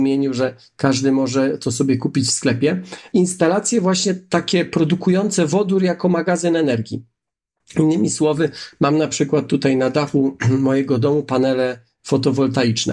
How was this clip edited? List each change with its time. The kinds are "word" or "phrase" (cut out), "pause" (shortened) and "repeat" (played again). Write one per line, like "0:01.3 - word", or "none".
none